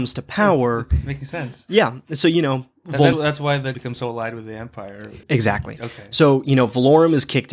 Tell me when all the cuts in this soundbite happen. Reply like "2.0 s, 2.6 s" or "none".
3.1 s, 3.7 s, 5.2 s